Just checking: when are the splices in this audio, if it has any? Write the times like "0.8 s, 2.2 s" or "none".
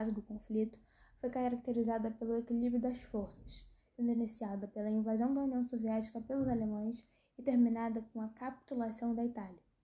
none